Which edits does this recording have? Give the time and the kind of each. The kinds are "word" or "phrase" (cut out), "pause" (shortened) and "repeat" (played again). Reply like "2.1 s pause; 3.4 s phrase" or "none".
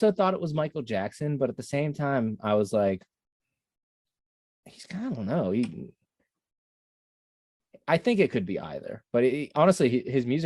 none